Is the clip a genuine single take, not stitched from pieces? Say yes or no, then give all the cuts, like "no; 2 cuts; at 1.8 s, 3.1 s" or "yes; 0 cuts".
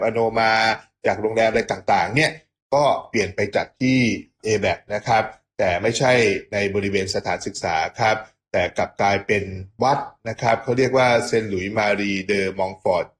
yes; 0 cuts